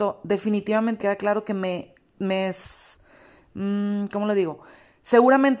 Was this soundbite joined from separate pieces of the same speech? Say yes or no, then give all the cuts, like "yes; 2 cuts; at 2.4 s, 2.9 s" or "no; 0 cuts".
yes; 1 cut; at 1.0 s